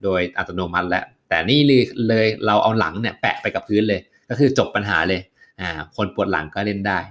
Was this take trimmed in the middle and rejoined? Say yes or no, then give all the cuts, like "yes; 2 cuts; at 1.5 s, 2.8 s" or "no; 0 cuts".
no; 0 cuts